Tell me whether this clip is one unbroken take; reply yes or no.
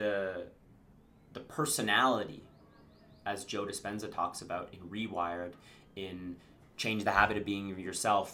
yes